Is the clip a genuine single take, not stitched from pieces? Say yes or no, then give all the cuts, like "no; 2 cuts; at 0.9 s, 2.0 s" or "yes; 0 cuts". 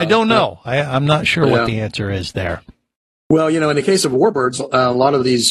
yes; 0 cuts